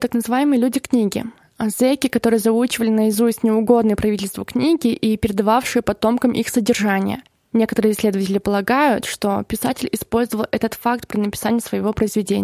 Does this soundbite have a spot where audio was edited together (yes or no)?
no